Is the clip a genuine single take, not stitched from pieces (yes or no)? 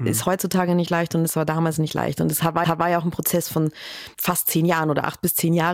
no